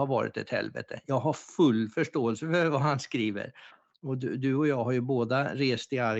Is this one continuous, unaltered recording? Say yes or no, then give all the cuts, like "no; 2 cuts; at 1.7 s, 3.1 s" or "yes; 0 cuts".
yes; 0 cuts